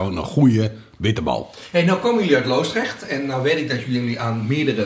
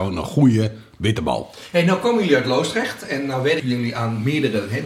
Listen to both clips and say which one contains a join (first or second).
second